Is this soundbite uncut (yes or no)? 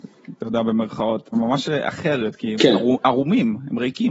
no